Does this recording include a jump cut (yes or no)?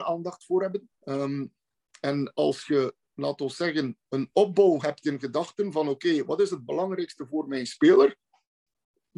yes